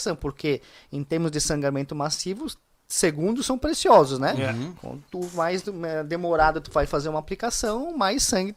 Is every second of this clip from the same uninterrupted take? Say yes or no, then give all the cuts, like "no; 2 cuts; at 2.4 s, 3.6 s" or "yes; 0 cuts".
yes; 0 cuts